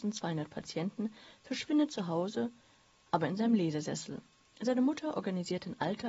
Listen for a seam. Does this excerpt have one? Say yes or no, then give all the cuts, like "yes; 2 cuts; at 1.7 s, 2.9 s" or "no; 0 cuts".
no; 0 cuts